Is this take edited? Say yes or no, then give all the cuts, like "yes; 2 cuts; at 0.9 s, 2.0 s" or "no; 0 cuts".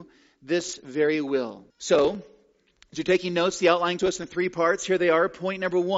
yes; 2 cuts; at 1.7 s, 4.0 s